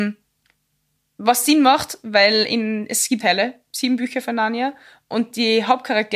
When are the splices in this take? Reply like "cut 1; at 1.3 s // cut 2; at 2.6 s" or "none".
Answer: cut 1; at 3.2 s